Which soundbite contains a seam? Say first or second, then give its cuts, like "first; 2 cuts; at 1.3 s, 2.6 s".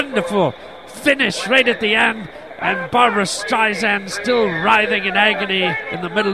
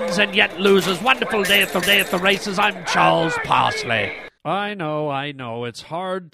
second; 2 cuts; at 1.8 s, 4.4 s